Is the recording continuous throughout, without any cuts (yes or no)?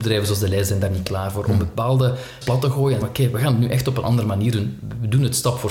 no